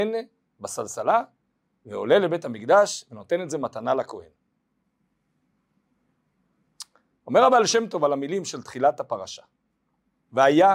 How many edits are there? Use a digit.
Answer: 0